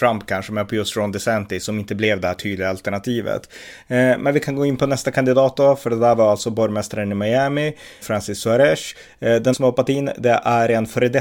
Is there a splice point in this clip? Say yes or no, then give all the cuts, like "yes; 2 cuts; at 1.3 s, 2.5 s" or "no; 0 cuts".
yes; 2 cuts; at 8.0 s, 9.5 s